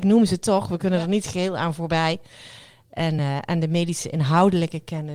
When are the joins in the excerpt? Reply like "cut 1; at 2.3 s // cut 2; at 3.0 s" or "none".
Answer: none